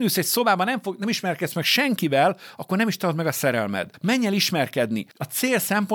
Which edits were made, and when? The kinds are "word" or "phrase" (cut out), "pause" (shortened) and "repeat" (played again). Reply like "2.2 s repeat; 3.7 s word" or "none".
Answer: none